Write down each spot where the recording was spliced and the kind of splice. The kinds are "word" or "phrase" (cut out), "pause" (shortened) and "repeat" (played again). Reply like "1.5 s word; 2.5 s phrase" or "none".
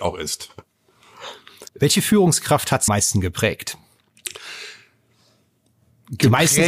1.7 s pause; 2.9 s phrase